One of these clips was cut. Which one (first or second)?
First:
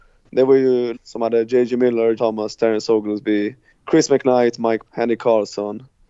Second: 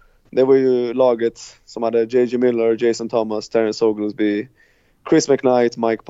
first